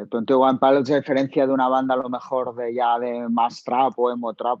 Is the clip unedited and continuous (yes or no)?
yes